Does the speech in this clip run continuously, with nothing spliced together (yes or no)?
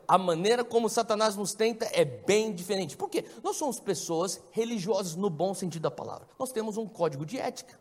no